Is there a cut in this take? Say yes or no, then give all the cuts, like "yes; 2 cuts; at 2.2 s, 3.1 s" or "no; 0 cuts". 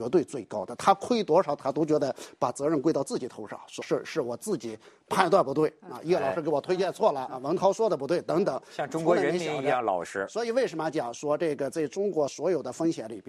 yes; 2 cuts; at 3.8 s, 7.3 s